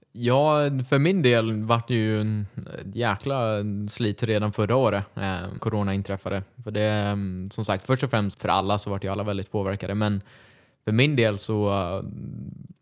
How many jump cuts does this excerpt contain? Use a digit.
2